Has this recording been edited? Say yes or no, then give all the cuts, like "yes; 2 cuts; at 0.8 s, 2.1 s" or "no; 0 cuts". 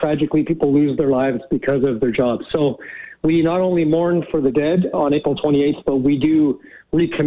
yes; 1 cut; at 4.9 s